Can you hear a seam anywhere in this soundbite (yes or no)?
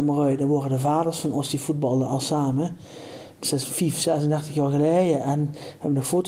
no